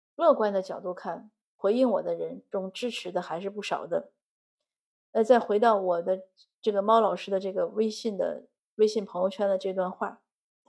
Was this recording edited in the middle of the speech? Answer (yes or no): no